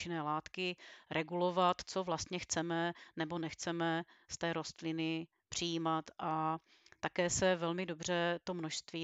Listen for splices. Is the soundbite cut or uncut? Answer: uncut